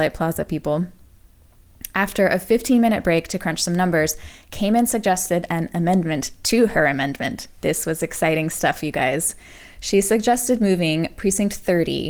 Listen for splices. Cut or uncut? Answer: uncut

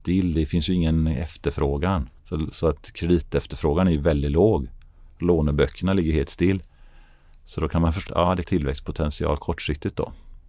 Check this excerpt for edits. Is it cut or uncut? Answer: cut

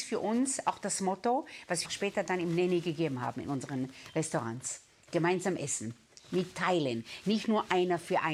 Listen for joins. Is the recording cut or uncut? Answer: cut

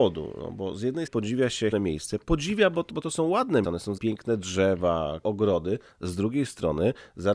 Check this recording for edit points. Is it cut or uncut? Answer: cut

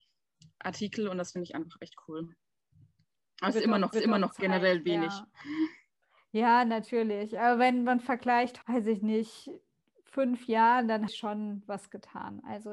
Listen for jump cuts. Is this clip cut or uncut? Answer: cut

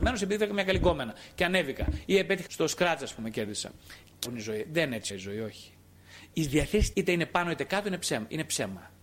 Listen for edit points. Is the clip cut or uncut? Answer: cut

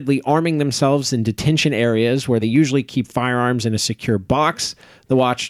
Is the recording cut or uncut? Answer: uncut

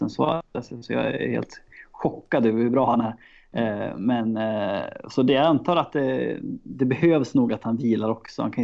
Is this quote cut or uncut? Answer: uncut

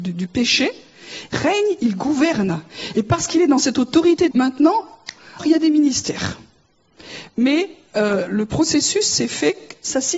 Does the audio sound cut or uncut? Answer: cut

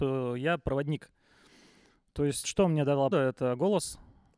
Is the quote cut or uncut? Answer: cut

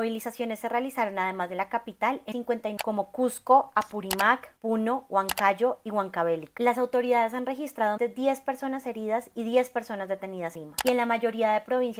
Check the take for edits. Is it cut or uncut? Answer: cut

